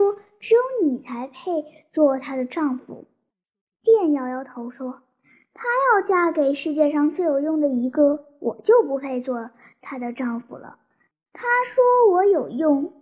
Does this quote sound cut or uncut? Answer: uncut